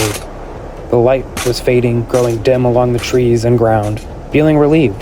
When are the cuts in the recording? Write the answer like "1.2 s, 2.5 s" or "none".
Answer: none